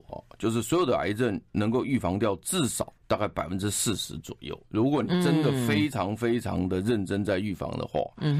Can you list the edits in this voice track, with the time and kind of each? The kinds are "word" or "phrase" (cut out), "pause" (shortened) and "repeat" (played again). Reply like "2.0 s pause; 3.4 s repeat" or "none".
1.5 s pause; 3.0 s pause; 4.6 s pause